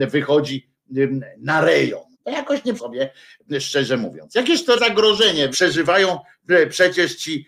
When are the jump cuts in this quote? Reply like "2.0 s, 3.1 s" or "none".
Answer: 2.1 s, 2.8 s, 4.8 s, 5.5 s